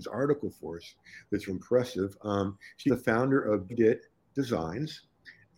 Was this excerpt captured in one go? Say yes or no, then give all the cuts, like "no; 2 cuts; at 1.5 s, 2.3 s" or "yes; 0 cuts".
no; 3 cuts; at 1.5 s, 2.9 s, 3.7 s